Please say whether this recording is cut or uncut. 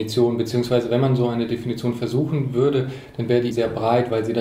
cut